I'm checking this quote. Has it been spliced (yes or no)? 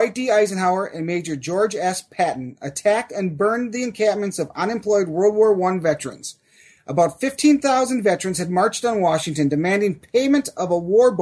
no